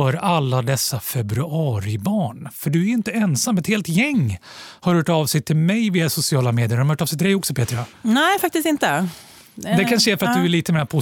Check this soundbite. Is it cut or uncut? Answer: uncut